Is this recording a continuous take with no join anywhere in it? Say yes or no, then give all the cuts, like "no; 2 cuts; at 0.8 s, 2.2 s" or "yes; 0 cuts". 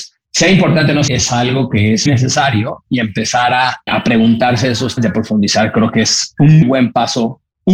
no; 5 cuts; at 1.1 s, 2.1 s, 3.9 s, 5.0 s, 6.6 s